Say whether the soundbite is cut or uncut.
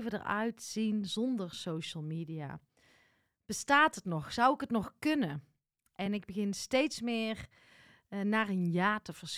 uncut